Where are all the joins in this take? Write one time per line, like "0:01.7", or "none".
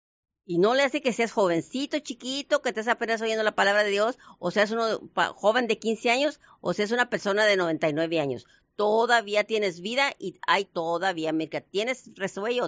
0:10.7